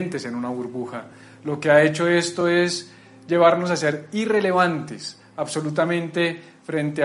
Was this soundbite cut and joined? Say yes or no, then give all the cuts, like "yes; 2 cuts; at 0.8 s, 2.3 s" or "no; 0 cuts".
no; 0 cuts